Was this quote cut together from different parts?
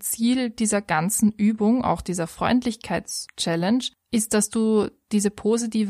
no; 0 cuts

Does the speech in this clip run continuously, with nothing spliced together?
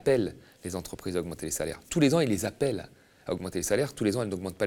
yes; 0 cuts

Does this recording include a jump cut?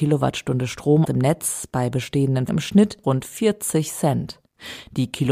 yes; 3 cuts; at 1.0 s, 2.5 s, 3.0 s

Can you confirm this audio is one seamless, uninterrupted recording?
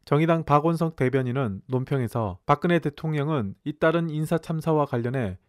no; 2 cuts; at 2.4 s, 3.6 s

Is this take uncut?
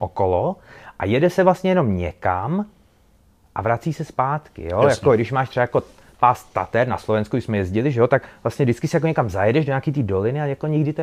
yes; 0 cuts

